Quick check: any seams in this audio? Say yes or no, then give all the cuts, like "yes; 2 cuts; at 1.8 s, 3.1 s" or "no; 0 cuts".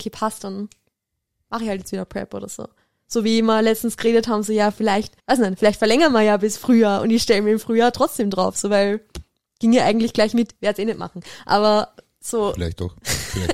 yes; 1 cut; at 5.2 s